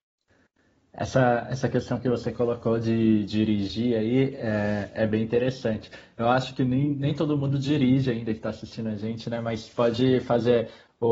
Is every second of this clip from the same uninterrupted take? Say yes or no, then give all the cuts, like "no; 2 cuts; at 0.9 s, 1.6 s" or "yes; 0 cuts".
yes; 0 cuts